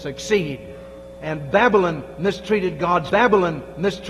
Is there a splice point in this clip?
yes; 1 cut; at 3.1 s

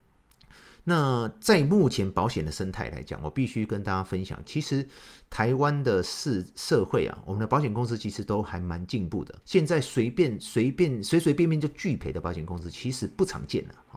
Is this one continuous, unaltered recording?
no; 2 cuts; at 4.4 s, 9.4 s

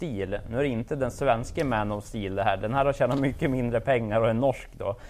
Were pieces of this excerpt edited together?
no; 0 cuts

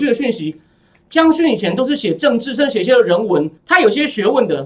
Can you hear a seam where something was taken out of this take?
yes; 1 cut; at 3.6 s

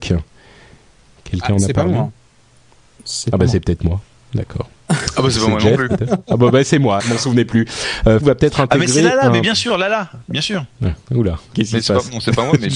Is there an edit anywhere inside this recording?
yes; 3 cuts; at 7.0 s, 8.2 s, 11.5 s

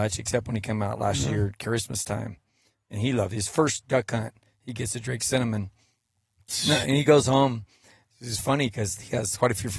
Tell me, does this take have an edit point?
no; 0 cuts

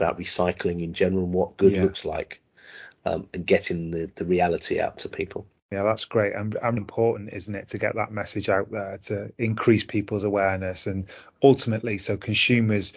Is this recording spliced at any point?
yes; 1 cut; at 6.8 s

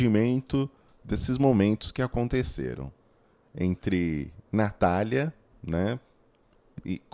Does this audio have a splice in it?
no; 0 cuts

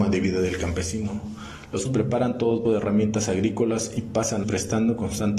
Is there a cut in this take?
yes; 3 cuts; at 1.9 s, 2.7 s, 4.4 s

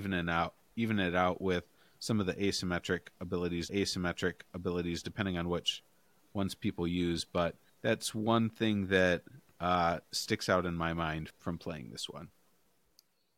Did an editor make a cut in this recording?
yes; 3 cuts; at 3.7 s, 7.7 s, 11.3 s

